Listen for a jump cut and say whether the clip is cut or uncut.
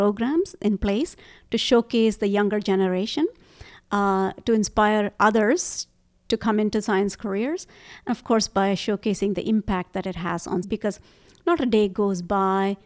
cut